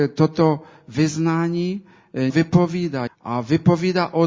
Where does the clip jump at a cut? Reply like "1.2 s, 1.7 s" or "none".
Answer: 2.3 s, 3.1 s